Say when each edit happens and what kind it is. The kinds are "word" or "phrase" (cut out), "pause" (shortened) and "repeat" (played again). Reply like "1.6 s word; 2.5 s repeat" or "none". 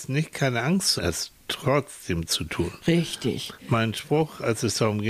1.0 s phrase